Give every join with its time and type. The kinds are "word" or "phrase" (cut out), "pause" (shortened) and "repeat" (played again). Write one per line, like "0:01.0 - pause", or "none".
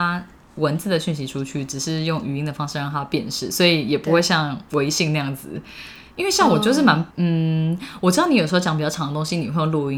0:07.1 - pause